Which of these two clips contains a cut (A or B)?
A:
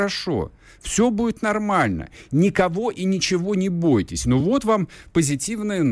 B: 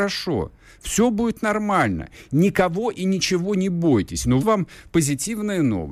B